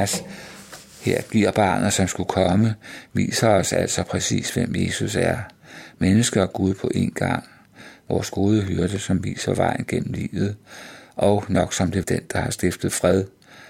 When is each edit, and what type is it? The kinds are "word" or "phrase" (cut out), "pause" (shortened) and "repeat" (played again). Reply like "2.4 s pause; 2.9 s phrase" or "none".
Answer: 12.0 s word